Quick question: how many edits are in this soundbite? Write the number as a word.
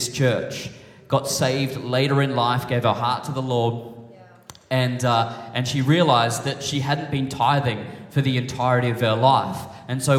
zero